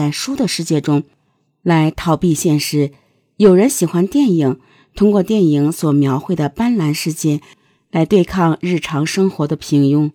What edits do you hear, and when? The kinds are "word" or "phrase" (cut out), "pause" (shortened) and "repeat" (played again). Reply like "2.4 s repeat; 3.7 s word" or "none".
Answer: none

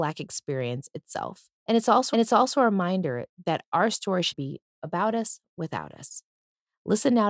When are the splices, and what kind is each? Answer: 1.6 s pause; 2.1 s repeat; 4.3 s word

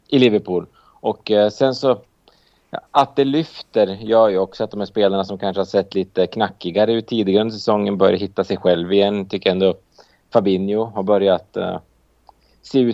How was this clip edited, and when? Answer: 2.9 s pause

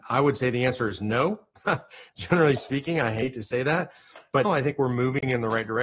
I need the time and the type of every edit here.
4.4 s word

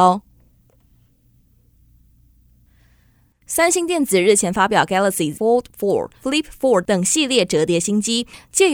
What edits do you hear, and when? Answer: 5.3 s word

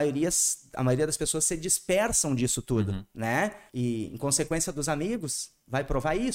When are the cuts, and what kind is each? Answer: 3.7 s pause

